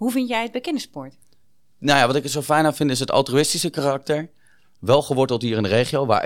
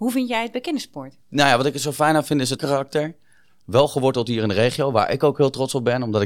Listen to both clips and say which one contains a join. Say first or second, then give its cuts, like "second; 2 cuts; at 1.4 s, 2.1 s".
second; 2 cuts; at 1.2 s, 2.6 s